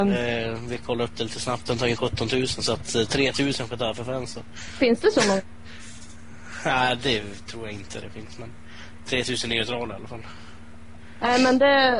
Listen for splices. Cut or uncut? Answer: uncut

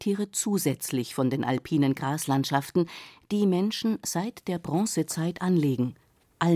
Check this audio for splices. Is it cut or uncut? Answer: uncut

